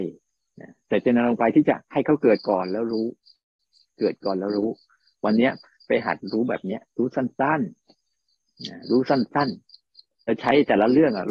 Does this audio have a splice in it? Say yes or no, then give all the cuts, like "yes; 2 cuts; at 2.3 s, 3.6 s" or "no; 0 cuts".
yes; 1 cut; at 10.2 s